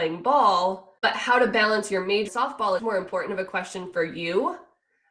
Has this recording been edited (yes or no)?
yes